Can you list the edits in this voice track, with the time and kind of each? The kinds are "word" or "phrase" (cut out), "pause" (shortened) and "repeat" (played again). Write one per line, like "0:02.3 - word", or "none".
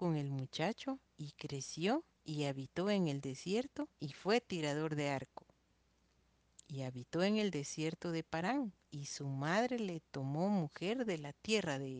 0:01.1 - pause
0:02.1 - pause
0:03.9 - pause
0:08.8 - pause